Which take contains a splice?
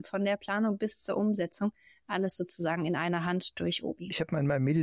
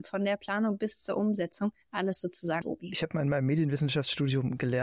second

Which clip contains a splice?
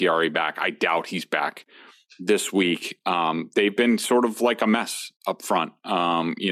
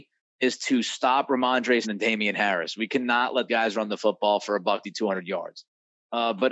second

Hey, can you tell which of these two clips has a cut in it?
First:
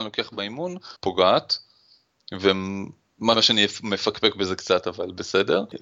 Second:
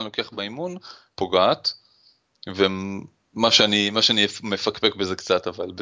first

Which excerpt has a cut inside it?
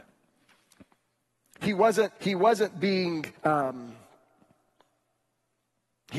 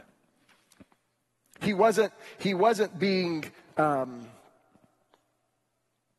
first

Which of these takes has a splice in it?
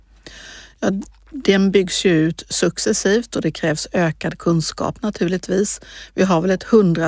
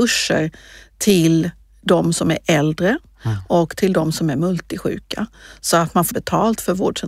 second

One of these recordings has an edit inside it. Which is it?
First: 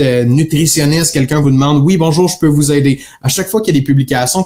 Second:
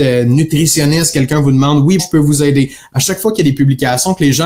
second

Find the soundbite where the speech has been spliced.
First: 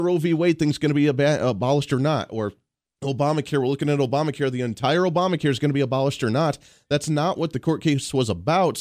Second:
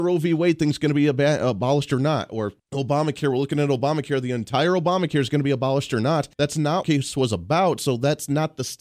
second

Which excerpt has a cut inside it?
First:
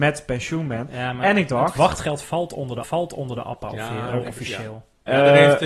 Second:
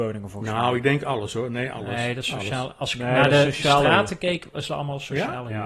first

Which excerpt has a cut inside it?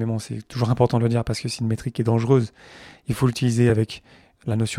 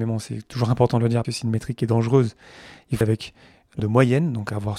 second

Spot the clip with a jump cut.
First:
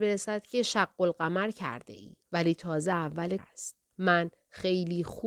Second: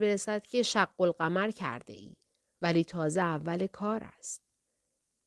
first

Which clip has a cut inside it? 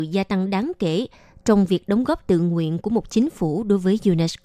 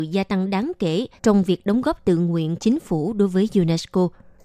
second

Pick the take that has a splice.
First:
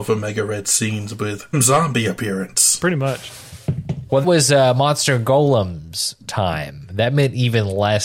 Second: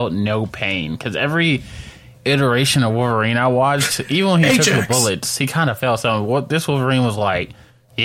first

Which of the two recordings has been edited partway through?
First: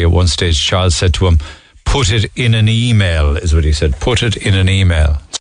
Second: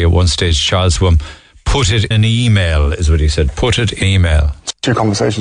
second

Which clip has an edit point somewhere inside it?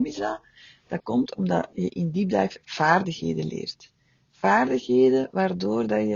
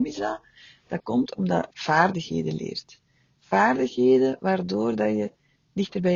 second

